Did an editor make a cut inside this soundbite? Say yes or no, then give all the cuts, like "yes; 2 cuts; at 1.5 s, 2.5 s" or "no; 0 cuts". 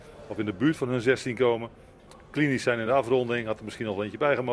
no; 0 cuts